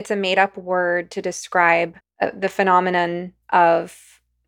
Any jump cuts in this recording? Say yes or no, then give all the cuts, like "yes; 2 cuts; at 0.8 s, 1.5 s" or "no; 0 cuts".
yes; 2 cuts; at 2.0 s, 3.4 s